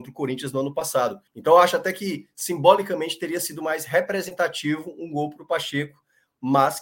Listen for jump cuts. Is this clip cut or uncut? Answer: cut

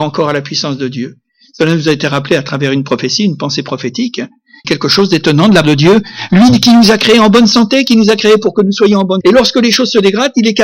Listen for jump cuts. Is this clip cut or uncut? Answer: cut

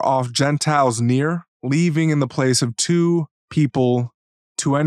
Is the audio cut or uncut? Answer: cut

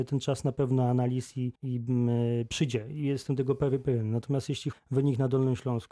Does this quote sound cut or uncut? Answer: cut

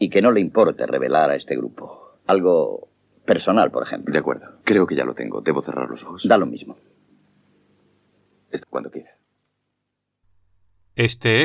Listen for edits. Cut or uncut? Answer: cut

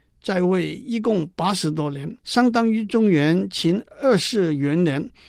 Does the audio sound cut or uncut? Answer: cut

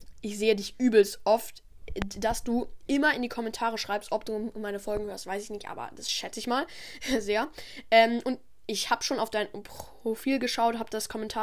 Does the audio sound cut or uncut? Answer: uncut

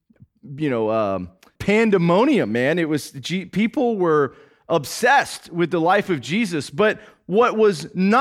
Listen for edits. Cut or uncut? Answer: cut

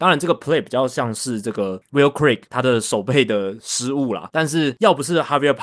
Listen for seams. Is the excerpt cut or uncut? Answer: uncut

